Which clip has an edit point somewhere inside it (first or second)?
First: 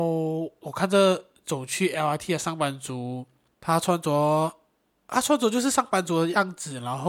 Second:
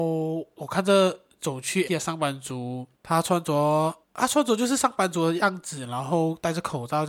second